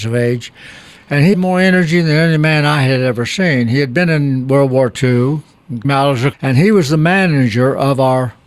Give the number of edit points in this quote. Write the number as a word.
three